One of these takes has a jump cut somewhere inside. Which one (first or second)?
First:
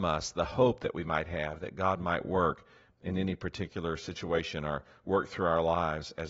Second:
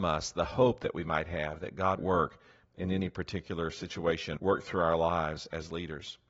second